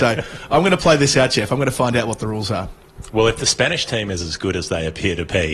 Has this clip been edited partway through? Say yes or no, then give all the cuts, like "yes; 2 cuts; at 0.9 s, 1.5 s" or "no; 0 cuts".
no; 0 cuts